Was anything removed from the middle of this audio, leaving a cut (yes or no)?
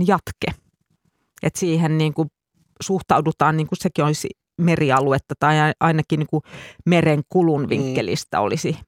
no